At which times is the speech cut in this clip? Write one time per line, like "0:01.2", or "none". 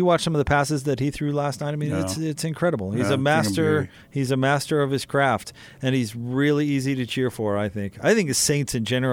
0:04.0